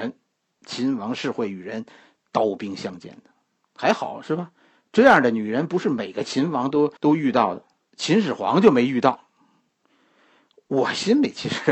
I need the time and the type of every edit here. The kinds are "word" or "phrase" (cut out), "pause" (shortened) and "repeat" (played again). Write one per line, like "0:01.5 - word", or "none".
0:07.0 - pause